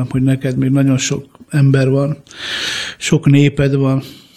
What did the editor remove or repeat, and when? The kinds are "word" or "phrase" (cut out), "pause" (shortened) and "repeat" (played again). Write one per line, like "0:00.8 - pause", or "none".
none

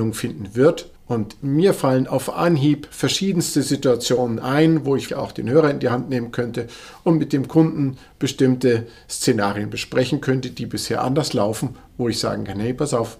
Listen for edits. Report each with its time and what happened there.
0:01.0 - pause
0:05.1 - word

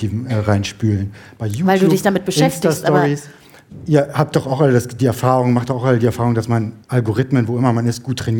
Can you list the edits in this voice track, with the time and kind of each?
0:06.8 - pause

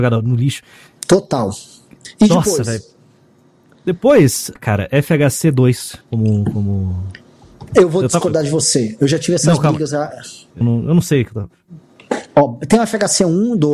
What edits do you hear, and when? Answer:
0:04.6 - word
0:06.0 - pause
0:10.6 - word

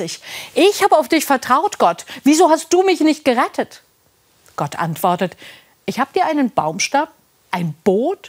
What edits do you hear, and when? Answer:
none

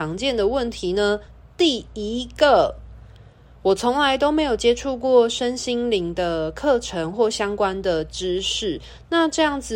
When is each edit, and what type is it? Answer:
none

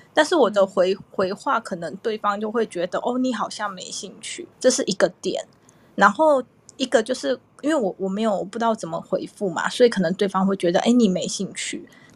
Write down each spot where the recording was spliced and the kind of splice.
0:04.5 - pause

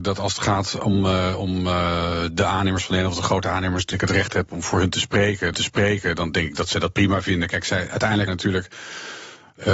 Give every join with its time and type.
0:03.9 - word
0:05.5 - repeat
0:08.3 - word

